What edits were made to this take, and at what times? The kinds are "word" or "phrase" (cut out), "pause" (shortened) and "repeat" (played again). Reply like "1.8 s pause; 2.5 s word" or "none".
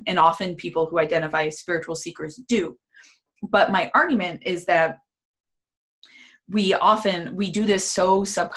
none

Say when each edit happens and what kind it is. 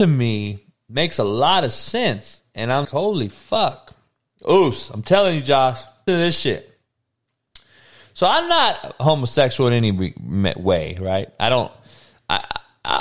2.8 s word; 6.1 s word

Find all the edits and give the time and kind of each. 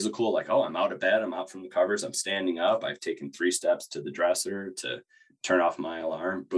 none

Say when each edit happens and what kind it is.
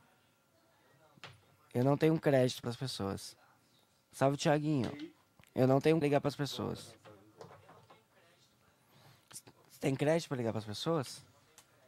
2.6 s phrase; 6.0 s phrase

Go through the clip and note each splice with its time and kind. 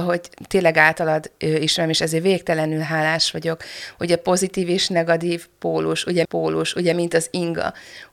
6.2 s repeat

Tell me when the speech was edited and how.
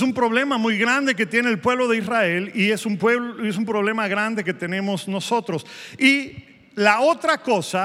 none

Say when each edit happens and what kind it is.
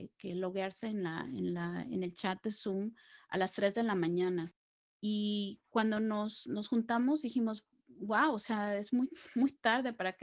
none

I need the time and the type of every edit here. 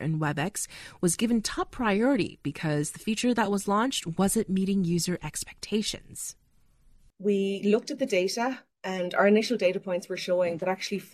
none

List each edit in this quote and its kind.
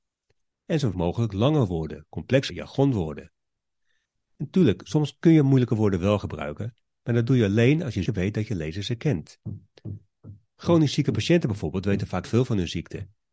0.9 s word; 2.5 s word; 8.1 s word; 12.2 s word

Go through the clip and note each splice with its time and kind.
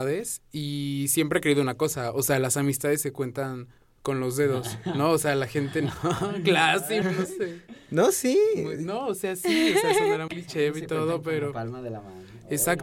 3.8 s pause; 7.0 s word; 10.3 s word

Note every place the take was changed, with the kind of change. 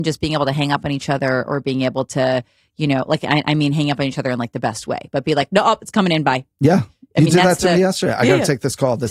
none

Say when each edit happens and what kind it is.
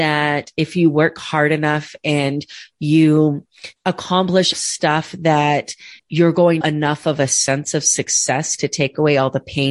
4.5 s word; 6.0 s pause; 6.6 s phrase

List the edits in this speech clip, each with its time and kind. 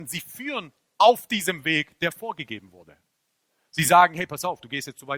none

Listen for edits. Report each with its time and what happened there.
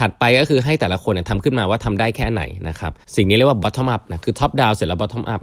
3.0 s pause

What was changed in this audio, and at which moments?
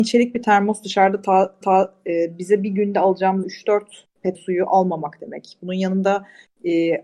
1.6 s repeat; 3.4 s word; 4.3 s word

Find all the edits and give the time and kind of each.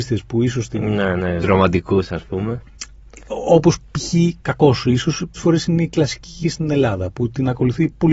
1.4 s word; 5.4 s word; 6.4 s word

